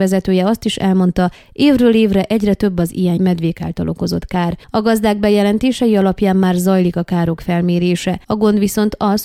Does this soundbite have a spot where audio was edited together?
yes; 3 cuts; at 3.2 s, 4.6 s, 8.2 s

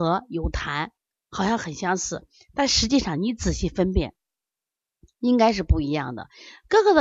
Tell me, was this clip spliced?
no; 0 cuts

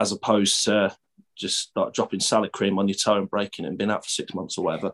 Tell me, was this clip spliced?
no; 0 cuts

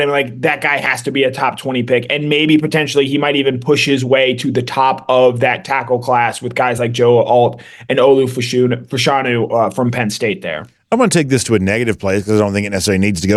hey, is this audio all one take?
yes; 0 cuts

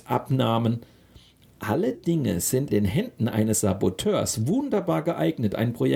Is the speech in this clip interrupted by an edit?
yes; 2 cuts; at 1.9 s, 2.7 s

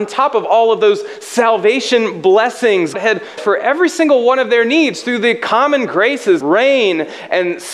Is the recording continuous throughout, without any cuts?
no; 3 cuts; at 2.9 s, 3.4 s, 6.4 s

